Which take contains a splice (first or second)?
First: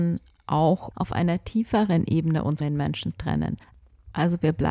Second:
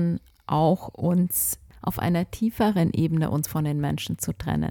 first